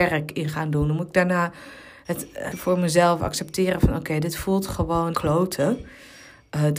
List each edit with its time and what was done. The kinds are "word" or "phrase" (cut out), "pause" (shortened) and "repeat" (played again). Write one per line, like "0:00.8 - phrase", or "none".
0:02.5 - word
0:05.1 - word